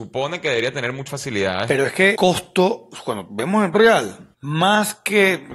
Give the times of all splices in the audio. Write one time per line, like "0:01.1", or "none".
0:01.1
0:02.2
0:03.7
0:04.3